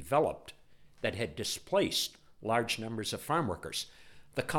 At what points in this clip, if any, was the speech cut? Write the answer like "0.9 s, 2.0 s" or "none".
none